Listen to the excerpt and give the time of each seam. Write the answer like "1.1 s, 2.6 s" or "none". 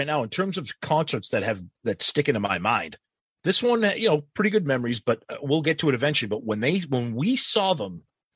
none

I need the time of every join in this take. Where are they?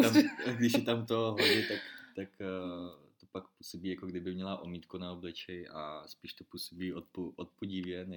none

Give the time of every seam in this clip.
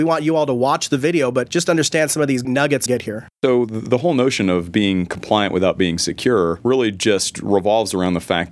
2.4 s, 2.9 s

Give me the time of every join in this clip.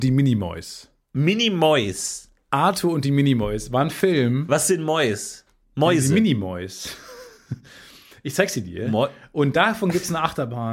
none

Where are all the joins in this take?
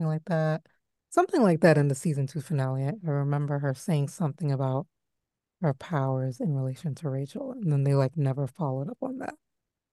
none

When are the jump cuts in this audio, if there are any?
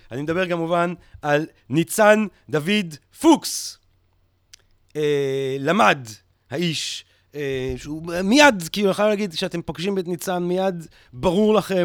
none

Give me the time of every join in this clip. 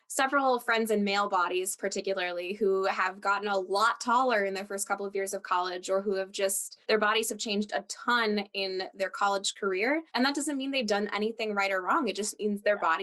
6.8 s, 10.1 s

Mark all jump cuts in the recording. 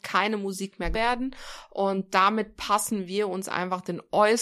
0.9 s

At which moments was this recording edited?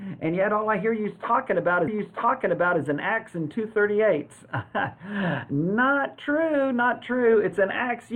1.9 s

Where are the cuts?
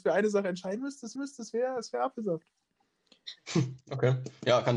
1.2 s

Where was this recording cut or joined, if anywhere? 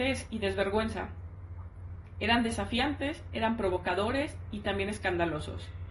none

